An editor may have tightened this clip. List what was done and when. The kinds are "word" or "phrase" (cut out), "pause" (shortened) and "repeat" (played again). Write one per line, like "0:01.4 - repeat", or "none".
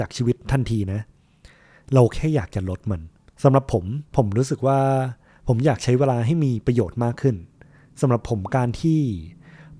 0:04.1 - pause